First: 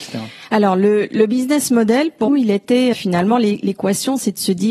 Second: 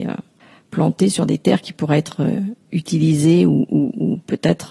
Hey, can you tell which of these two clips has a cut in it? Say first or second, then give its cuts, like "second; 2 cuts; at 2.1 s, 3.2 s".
first; 2 cuts; at 2.3 s, 2.9 s